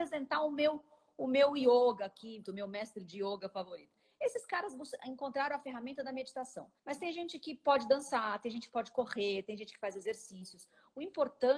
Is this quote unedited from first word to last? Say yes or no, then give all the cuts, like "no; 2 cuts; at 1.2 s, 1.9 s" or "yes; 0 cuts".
no; 2 cuts; at 2.4 s, 6.8 s